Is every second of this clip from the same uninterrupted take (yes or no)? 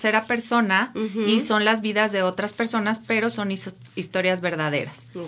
yes